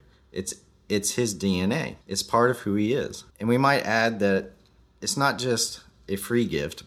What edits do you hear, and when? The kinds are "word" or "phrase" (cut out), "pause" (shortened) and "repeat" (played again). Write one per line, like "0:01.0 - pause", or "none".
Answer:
0:02.0 - pause
0:03.3 - pause